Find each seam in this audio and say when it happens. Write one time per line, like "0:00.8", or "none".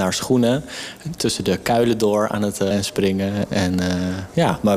0:02.7